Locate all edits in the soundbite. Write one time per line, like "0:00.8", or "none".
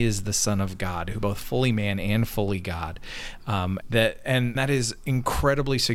0:01.2
0:03.8
0:04.6